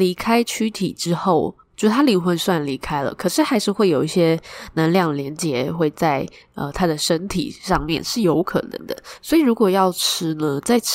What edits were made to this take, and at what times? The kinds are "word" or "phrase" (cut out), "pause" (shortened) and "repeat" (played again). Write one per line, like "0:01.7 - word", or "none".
none